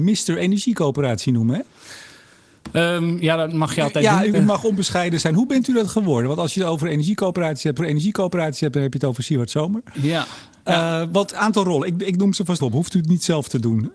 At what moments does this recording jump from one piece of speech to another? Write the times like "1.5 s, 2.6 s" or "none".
4.3 s, 7.8 s, 11.3 s, 12.6 s